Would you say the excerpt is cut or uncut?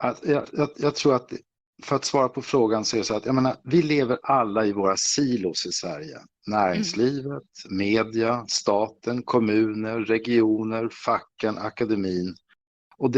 uncut